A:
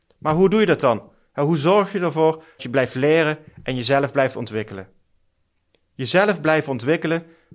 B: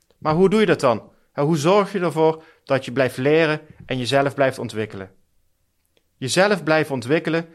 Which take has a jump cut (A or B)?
A